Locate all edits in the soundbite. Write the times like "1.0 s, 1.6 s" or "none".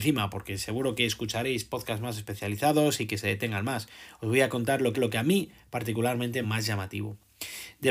4.9 s, 6.4 s